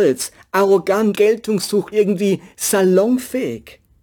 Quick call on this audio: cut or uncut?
cut